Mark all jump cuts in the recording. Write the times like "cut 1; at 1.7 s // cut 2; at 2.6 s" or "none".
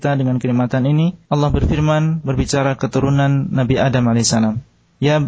cut 1; at 1.2 s // cut 2; at 2.8 s